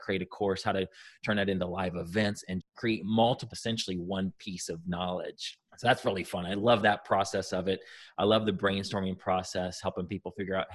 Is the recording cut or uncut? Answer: cut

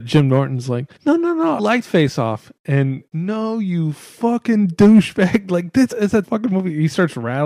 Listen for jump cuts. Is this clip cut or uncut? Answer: cut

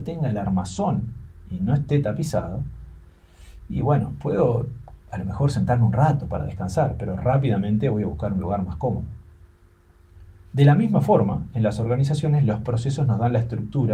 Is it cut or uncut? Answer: uncut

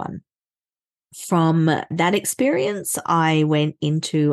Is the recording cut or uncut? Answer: uncut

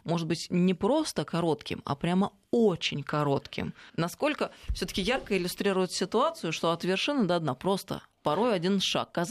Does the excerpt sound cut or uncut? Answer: cut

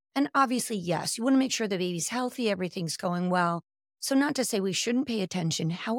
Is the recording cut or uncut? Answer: uncut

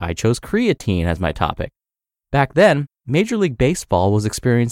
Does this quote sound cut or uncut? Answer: uncut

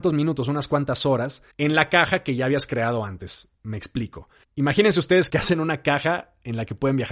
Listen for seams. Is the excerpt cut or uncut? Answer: cut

